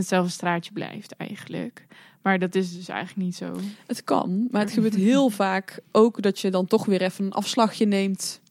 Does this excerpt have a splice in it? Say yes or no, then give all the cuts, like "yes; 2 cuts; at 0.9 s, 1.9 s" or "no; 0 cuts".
no; 0 cuts